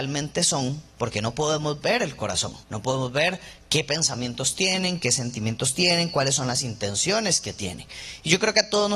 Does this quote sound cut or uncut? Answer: cut